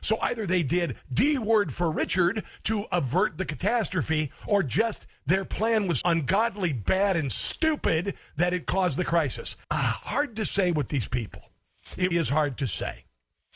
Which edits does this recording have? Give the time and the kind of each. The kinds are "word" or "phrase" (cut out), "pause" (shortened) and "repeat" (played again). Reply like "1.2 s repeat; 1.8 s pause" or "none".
6.0 s word; 9.6 s pause; 12.1 s phrase